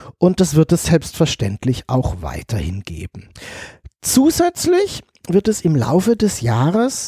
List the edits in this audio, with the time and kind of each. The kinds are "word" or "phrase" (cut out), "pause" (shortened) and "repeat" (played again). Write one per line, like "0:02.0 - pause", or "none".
none